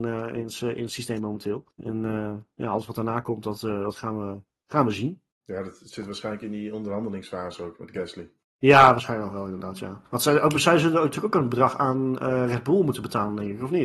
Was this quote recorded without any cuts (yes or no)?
yes